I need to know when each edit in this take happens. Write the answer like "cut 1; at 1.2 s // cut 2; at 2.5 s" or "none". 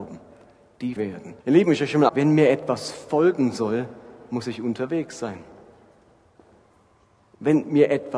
cut 1; at 1.0 s // cut 2; at 1.4 s // cut 3; at 2.1 s